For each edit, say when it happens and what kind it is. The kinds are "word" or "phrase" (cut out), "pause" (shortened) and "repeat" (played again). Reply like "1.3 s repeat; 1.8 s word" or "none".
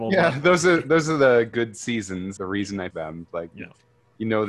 1.5 s word; 2.4 s word; 2.9 s word